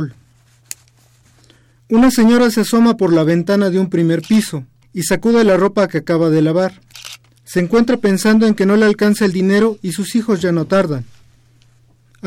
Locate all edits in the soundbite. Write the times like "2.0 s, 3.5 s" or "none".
4.8 s, 7.2 s